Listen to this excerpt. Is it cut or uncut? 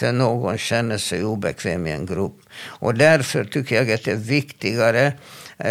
uncut